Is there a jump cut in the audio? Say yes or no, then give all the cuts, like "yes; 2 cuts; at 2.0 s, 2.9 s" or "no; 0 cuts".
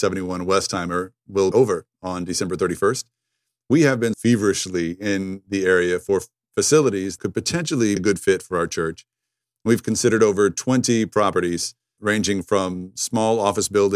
yes; 5 cuts; at 1.5 s, 4.1 s, 7.2 s, 8.0 s, 12.0 s